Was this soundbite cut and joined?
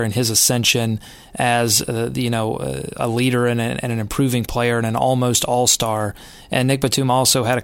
no; 0 cuts

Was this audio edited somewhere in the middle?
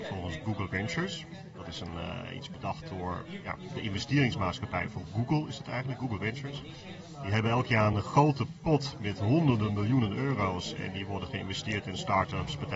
no; 0 cuts

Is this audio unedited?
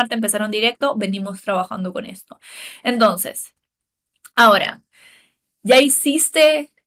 yes; 0 cuts

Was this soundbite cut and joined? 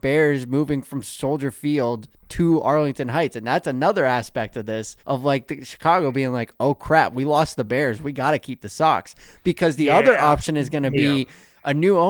yes; 1 cut; at 5.0 s

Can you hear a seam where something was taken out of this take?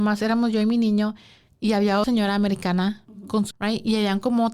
yes; 2 cuts; at 2.0 s, 3.5 s

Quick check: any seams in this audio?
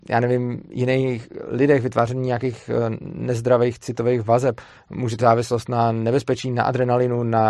yes; 1 cut; at 5.2 s

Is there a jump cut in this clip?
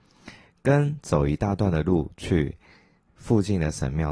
no; 0 cuts

